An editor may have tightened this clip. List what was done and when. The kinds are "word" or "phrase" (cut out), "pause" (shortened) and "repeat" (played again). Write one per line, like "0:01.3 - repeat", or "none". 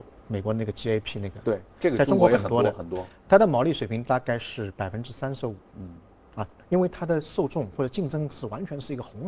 none